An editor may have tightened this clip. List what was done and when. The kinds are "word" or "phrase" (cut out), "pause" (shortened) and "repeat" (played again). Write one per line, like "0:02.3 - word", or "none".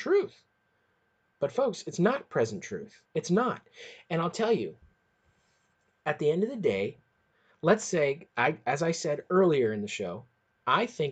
0:03.1 - pause

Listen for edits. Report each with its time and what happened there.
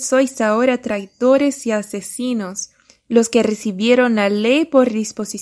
0:02.9 - pause

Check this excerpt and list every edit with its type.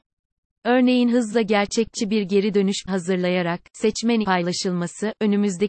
0:02.9 - word
0:04.2 - word

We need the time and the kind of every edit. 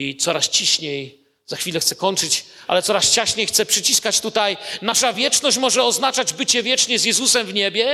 none

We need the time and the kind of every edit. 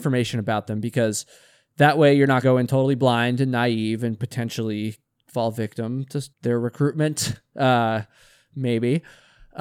0:02.4 - phrase
0:06.3 - pause

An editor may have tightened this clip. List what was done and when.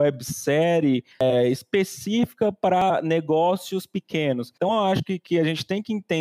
0:04.6 - pause

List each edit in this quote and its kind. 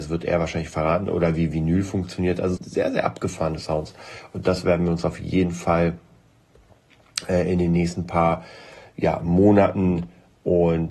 0:02.6 - word

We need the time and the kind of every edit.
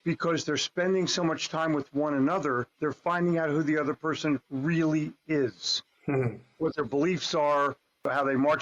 0:02.7 - pause
0:04.4 - pause

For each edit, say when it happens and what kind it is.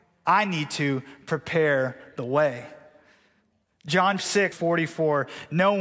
0:04.2 - word
0:04.5 - word

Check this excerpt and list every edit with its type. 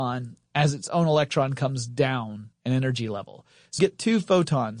0:02.5 - pause
0:03.8 - word

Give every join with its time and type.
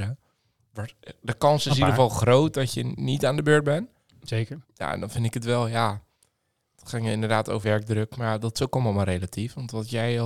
0:04.6 - pause
0:07.6 - phrase

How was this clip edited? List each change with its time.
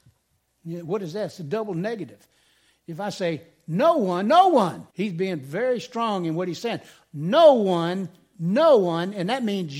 0:04.9 - pause

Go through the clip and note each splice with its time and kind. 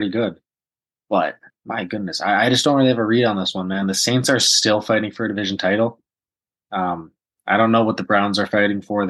none

